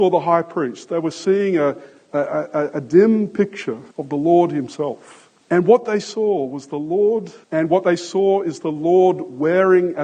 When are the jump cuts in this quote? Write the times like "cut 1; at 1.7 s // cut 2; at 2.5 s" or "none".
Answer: cut 1; at 3.9 s // cut 2; at 5.4 s // cut 3; at 7.4 s